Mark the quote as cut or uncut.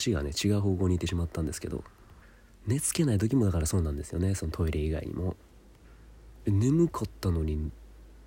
uncut